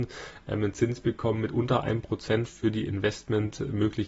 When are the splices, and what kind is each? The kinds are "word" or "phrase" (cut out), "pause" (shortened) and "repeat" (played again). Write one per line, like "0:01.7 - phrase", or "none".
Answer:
none